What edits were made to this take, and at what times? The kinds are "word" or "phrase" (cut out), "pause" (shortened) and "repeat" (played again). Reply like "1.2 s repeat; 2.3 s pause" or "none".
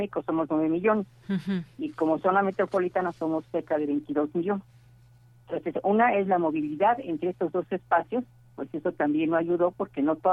none